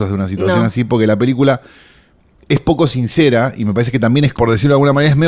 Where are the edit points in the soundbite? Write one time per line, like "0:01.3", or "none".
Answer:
0:04.3